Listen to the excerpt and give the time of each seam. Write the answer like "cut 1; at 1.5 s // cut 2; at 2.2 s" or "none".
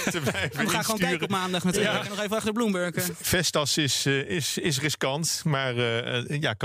none